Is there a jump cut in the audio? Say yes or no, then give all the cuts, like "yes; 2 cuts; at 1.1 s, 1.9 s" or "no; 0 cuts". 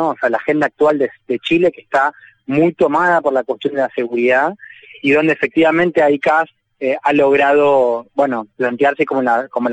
no; 0 cuts